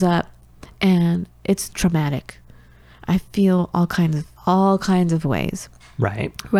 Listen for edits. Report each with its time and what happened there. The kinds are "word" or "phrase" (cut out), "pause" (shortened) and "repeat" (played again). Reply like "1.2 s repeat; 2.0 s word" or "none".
1.7 s word; 4.3 s pause